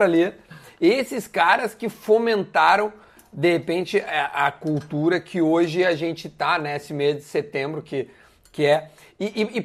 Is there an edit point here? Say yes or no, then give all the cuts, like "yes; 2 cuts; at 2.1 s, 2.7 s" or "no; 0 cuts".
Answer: no; 0 cuts